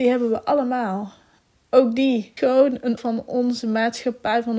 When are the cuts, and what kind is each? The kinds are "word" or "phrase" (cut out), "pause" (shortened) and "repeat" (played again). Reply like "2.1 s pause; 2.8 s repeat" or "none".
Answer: 2.4 s word; 3.0 s word